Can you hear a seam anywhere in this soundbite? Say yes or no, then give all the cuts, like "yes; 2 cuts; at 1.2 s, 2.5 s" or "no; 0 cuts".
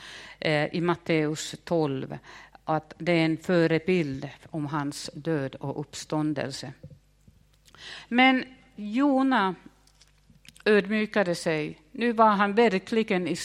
no; 0 cuts